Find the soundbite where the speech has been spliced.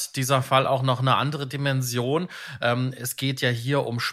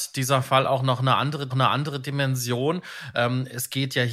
second; 1 cut; at 1.5 s

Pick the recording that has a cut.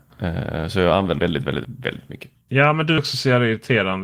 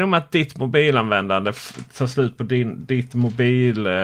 first; 3 cuts; at 1.2 s, 1.6 s, 3.0 s

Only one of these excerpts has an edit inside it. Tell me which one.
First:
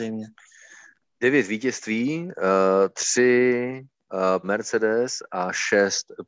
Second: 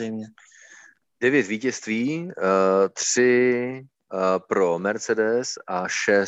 first; 1 cut; at 4.4 s

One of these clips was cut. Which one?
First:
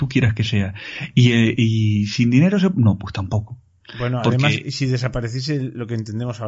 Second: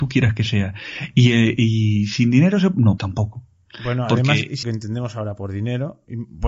second; 2 cuts; at 3.0 s, 4.6 s

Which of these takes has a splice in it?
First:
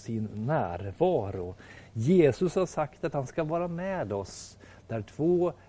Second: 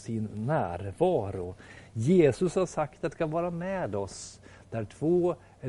second; 1 cut; at 3.1 s

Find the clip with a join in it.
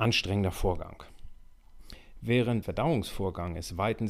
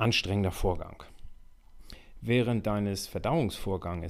first; 1 cut; at 2.6 s

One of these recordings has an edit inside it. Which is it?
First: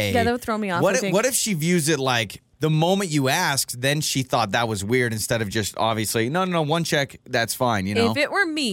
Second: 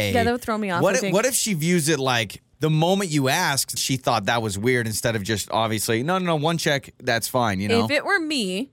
second; 1 cut; at 3.8 s

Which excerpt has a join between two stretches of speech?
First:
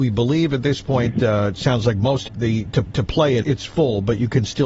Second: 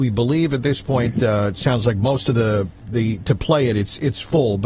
first; 3 cuts; at 2.3 s, 2.9 s, 3.4 s

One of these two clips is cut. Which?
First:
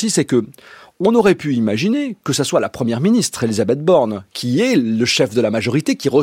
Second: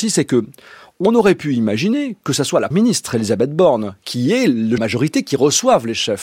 second; 2 cuts; at 2.7 s, 4.8 s

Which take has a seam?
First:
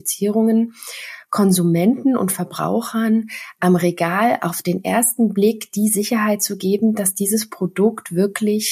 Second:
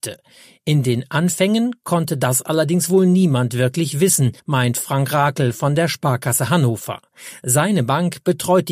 second; 1 cut; at 4.4 s

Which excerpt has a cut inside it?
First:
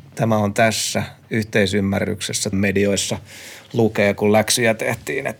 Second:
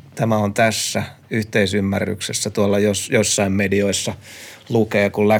first; 1 cut; at 2.5 s

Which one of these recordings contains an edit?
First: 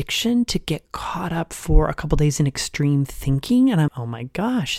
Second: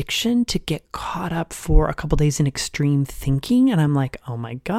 first; 1 cut; at 3.9 s

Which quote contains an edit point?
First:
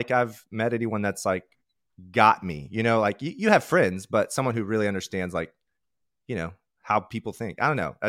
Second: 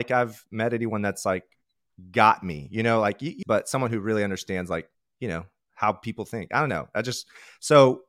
second; 2 cuts; at 3.4 s, 4.9 s

